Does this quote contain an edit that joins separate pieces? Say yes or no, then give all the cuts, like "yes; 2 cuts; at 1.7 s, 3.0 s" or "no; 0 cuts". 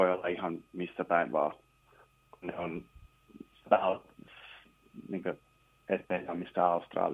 yes; 1 cut; at 2.4 s